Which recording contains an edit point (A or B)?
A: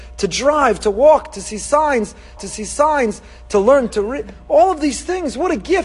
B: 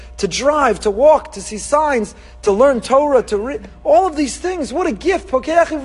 A